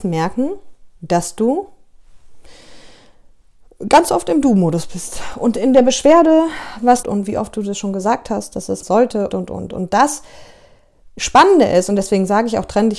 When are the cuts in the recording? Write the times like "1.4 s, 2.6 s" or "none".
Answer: 1.0 s, 7.0 s, 8.8 s, 9.3 s